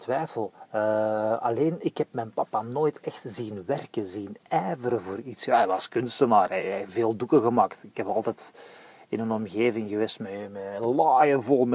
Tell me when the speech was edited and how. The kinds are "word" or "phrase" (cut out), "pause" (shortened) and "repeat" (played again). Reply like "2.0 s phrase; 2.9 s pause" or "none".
none